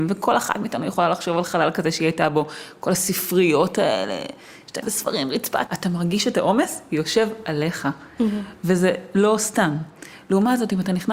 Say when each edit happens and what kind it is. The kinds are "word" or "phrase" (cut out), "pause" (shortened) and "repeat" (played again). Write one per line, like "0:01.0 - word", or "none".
0:04.8 - word
0:05.7 - word